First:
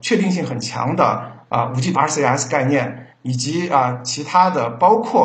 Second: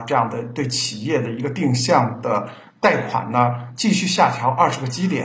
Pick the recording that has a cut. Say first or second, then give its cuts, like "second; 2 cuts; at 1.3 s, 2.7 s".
first; 1 cut; at 1.9 s